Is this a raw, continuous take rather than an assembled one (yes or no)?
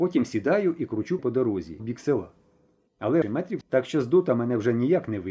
no